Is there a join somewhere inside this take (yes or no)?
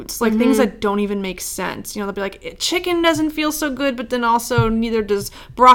no